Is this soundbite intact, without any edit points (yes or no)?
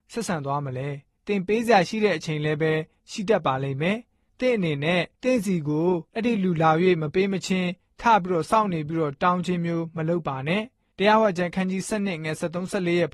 no